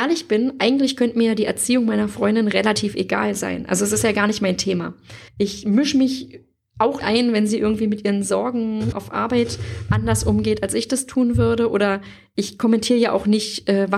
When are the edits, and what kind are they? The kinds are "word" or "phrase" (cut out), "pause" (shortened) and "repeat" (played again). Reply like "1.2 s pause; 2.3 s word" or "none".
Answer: 5.3 s pause; 7.0 s word; 8.9 s word

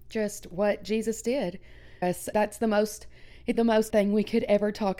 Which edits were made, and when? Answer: 2.0 s word; 2.3 s word; 3.5 s word; 3.9 s word

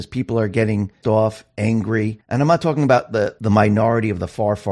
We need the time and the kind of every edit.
1.0 s word; 3.4 s word

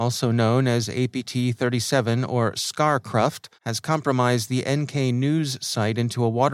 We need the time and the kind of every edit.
3.5 s pause

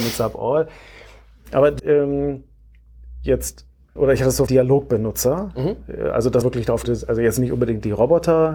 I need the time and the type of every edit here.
1.8 s word; 4.0 s word; 4.5 s word; 6.4 s word; 6.8 s word

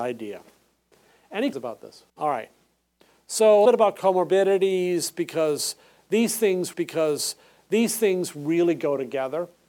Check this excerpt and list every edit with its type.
1.5 s word; 2.1 s pause; 3.7 s phrase; 6.7 s repeat

